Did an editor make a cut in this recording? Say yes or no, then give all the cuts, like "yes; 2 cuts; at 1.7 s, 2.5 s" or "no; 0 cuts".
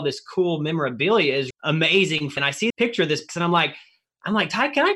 yes; 4 cuts; at 1.5 s, 2.4 s, 2.7 s, 3.3 s